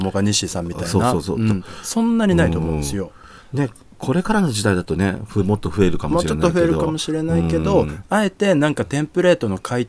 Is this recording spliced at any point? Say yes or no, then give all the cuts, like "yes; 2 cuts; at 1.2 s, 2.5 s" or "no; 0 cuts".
no; 0 cuts